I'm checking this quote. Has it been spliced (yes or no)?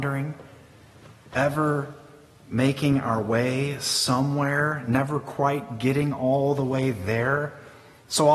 no